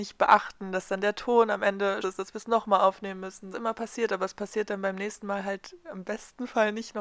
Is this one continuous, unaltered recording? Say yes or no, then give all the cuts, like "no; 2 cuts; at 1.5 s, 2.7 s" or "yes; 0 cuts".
no; 2 cuts; at 2.0 s, 3.5 s